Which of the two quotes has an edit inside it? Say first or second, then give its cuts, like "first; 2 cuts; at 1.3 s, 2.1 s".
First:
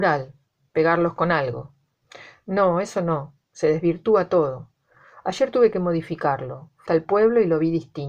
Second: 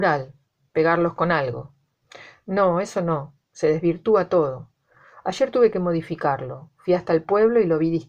first; 1 cut; at 6.9 s